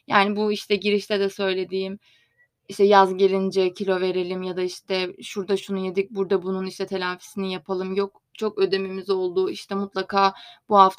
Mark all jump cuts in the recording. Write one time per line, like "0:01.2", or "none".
none